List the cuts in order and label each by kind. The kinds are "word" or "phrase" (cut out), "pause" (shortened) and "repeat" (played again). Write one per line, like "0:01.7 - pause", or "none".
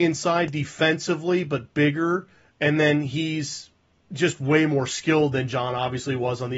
none